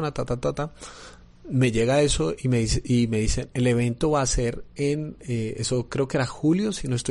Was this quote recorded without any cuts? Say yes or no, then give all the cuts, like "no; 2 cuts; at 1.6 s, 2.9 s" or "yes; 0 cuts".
yes; 0 cuts